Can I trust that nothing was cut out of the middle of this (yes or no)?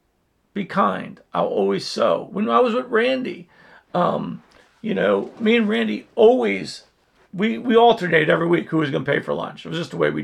yes